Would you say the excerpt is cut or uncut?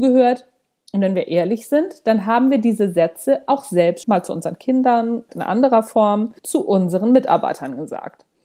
cut